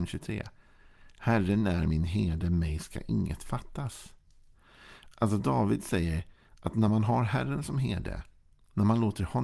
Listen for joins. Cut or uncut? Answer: uncut